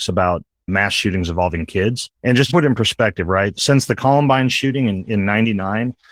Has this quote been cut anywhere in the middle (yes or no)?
yes